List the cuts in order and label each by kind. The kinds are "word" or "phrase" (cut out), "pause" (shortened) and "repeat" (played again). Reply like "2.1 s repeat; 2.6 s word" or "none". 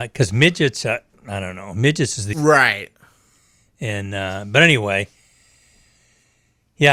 2.3 s word